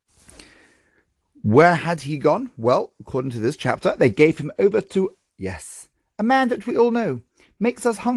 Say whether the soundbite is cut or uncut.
uncut